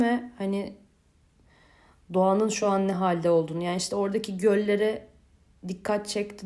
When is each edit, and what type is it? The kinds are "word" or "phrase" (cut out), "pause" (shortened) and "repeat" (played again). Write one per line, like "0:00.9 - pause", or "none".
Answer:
none